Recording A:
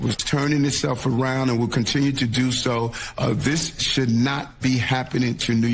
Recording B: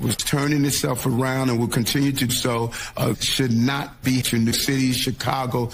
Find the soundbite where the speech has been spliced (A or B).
B